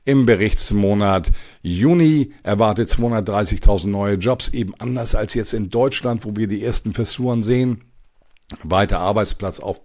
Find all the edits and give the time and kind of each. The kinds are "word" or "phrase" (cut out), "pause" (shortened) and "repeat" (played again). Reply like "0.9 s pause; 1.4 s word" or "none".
none